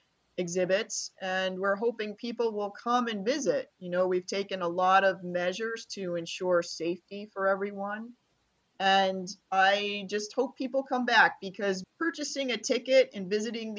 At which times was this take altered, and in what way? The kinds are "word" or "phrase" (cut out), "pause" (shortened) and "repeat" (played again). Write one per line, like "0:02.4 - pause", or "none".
0:09.4 - pause
0:11.8 - word